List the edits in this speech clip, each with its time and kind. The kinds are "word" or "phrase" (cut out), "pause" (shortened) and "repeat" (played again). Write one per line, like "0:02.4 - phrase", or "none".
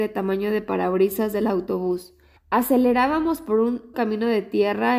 0:02.4 - pause
0:03.9 - word